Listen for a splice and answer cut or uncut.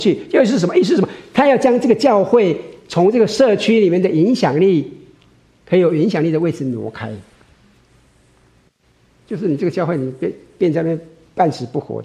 uncut